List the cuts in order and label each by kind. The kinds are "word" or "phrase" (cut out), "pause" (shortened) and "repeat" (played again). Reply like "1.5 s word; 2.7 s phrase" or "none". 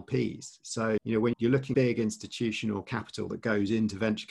1.0 s word; 1.3 s word; 1.7 s word

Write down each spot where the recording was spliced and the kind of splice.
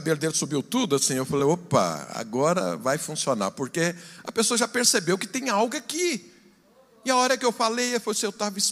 none

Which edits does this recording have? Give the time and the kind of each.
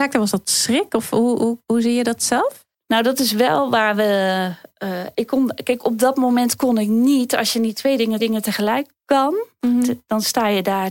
2.7 s pause; 8.2 s repeat

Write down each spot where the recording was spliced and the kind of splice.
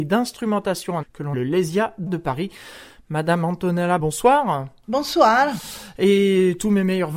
1.0 s word; 1.3 s word; 2.1 s word; 4.0 s word

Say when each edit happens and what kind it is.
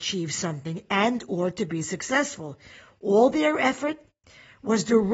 none

